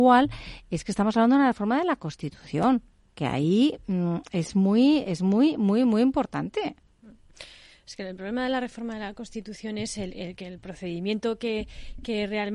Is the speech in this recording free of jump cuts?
yes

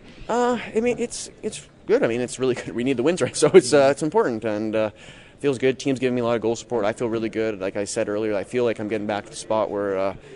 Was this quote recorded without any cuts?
no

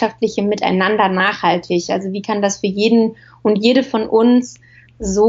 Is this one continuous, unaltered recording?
yes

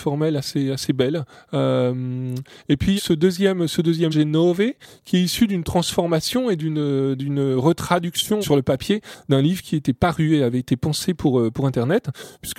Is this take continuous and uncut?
no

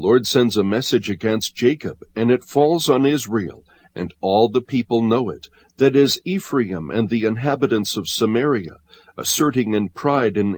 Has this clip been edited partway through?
no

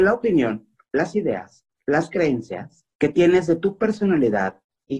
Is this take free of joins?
no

